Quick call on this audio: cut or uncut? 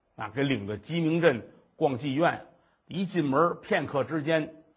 uncut